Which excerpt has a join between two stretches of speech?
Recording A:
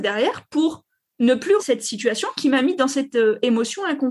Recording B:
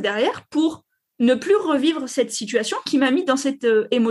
A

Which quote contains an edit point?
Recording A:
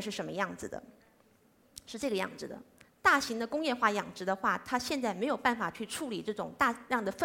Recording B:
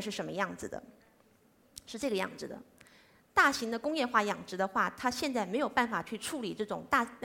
A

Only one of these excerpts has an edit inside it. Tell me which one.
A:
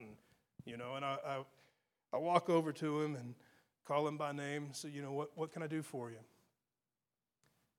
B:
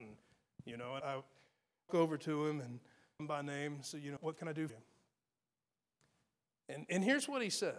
B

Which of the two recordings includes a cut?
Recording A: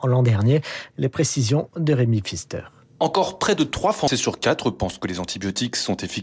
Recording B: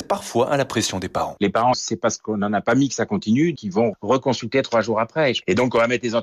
B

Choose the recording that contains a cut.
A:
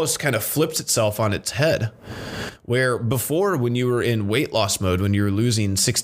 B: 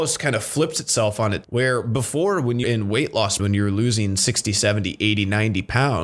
B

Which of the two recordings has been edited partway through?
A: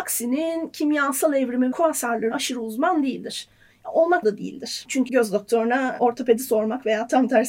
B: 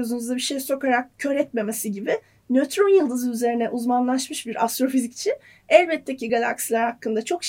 A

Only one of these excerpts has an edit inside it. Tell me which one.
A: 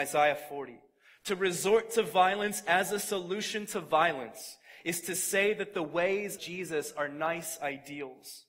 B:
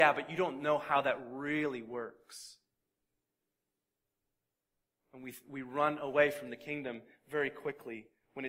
A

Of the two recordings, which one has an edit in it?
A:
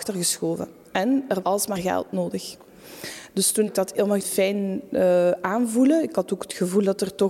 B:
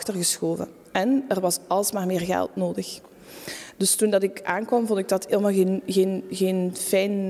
A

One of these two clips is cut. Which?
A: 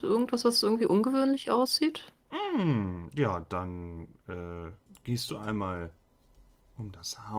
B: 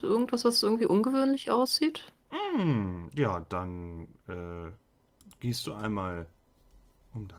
A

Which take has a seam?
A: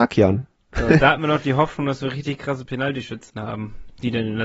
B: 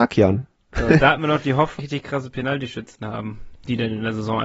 B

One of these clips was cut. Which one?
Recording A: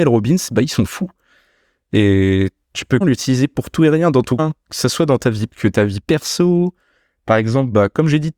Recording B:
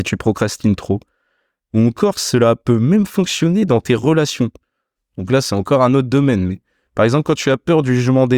A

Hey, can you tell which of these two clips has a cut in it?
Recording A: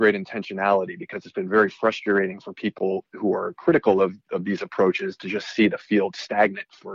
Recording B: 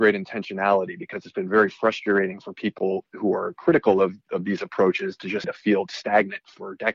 B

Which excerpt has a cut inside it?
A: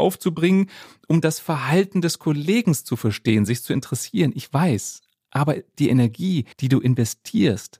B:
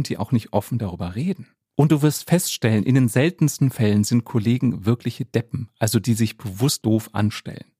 A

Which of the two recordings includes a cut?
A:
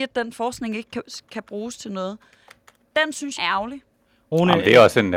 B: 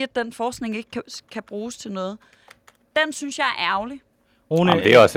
A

